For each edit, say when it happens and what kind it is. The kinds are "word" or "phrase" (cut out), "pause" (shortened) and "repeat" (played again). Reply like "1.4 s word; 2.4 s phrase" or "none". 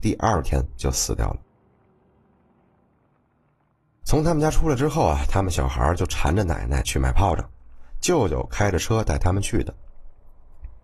none